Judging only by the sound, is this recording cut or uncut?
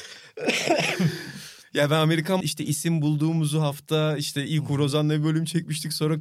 cut